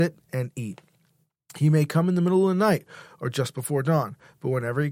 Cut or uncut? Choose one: uncut